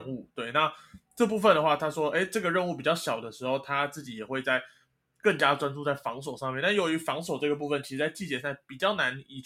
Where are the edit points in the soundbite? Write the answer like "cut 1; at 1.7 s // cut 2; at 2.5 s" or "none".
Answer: none